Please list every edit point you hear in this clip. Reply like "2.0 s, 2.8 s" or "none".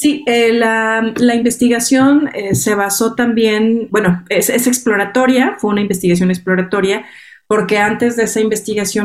3.9 s